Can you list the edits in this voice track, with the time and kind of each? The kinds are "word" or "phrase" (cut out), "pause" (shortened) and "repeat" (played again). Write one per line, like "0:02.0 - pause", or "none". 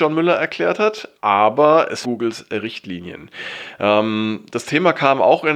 0:01.2 - pause
0:02.0 - phrase

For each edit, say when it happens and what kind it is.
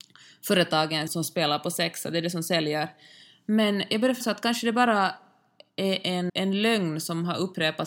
0:01.1 - word
0:04.2 - word
0:06.3 - word

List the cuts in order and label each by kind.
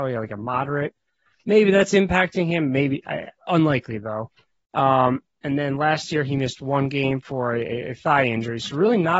none

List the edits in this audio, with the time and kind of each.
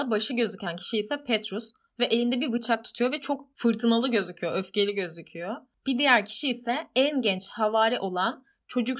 none

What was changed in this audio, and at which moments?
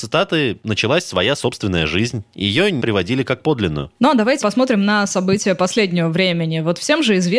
0:02.8 - word
0:04.4 - word

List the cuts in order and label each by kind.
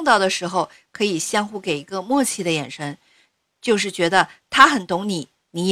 none

